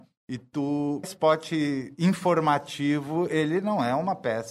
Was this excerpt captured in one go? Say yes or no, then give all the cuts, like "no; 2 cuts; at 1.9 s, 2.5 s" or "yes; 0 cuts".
no; 1 cut; at 1.0 s